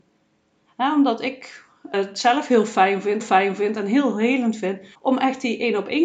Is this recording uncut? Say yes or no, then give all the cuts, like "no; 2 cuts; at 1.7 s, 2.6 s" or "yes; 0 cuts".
no; 3 cuts; at 1.9 s, 3.2 s, 4.9 s